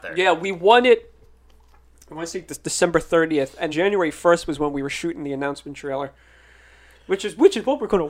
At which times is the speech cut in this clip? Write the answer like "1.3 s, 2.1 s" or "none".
3.7 s